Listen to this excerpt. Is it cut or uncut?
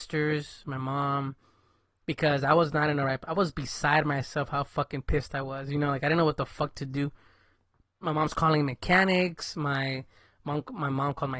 uncut